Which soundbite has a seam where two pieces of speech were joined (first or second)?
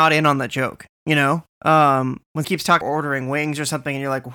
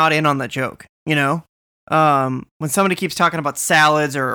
first